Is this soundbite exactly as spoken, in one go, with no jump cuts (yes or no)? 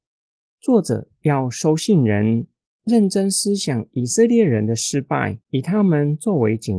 no